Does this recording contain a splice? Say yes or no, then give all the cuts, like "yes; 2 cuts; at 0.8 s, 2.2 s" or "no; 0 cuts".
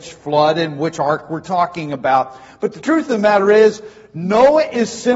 no; 0 cuts